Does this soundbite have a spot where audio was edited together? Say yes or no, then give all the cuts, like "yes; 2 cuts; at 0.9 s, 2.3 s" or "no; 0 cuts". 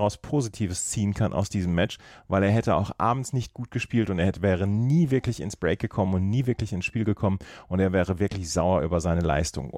no; 0 cuts